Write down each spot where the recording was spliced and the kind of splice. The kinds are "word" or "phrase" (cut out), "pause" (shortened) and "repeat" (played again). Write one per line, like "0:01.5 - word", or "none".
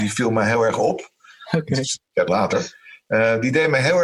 0:02.3 - word